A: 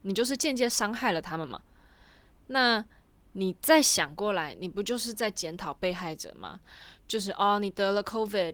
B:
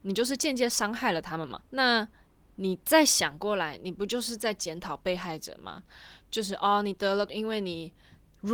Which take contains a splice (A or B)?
B